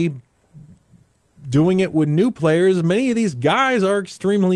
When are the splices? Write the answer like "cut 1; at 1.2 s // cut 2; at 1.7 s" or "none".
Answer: none